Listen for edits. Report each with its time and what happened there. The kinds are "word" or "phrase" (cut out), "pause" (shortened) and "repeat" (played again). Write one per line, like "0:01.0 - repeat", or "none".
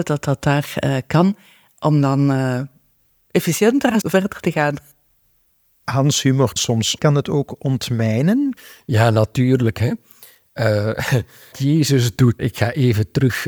0:04.0 - word
0:06.6 - word
0:07.0 - word
0:11.5 - word
0:12.4 - word